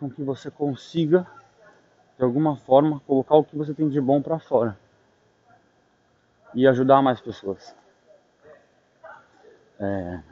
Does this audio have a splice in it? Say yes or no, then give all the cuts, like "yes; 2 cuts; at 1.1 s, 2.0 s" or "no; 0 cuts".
no; 0 cuts